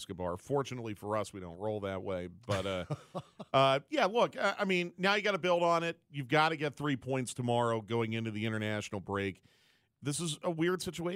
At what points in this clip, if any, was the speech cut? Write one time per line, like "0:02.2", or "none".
none